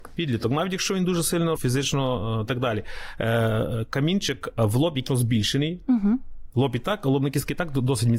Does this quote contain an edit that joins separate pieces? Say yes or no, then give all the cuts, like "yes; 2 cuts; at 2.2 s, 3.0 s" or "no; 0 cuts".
yes; 3 cuts; at 1.6 s, 2.5 s, 5.1 s